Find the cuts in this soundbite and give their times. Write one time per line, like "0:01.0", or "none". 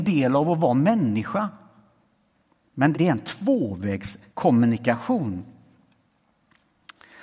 0:02.9
0:04.3